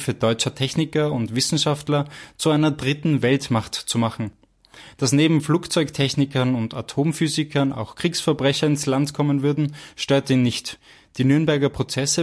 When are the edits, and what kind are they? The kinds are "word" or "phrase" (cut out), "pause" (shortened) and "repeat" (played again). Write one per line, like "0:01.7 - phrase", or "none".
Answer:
none